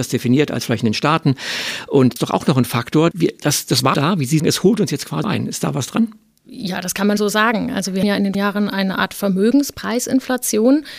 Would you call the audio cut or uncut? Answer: cut